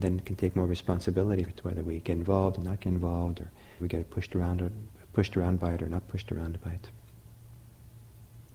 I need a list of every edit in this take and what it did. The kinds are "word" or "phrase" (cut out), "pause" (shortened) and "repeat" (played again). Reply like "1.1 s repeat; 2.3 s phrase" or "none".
1.5 s word; 3.8 s word